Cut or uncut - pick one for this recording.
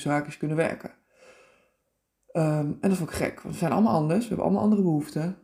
uncut